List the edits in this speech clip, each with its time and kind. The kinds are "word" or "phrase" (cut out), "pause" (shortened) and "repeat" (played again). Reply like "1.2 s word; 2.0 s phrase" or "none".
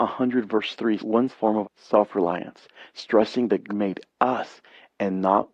1.0 s word; 1.3 s word; 1.6 s word; 3.7 s word